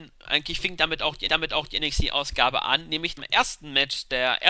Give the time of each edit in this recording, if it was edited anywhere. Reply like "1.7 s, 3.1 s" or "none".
1.3 s, 3.2 s